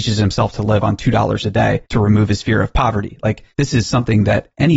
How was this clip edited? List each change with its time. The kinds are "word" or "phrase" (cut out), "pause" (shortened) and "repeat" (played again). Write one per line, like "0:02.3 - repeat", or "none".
0:01.9 - pause
0:03.5 - pause